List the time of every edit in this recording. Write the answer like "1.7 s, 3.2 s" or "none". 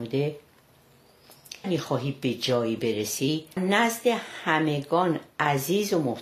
1.6 s, 3.6 s